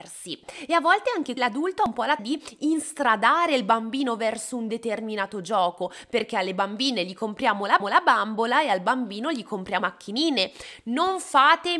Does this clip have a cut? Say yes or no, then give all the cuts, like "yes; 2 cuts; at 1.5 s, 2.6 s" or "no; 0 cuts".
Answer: yes; 4 cuts; at 1.4 s, 2.2 s, 7.8 s, 9.8 s